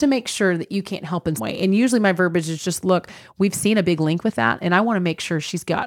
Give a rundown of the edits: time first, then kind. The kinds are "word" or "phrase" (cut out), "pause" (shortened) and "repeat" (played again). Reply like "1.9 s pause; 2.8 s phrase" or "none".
1.4 s word